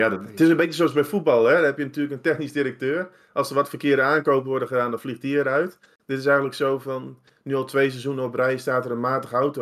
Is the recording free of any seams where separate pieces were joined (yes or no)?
yes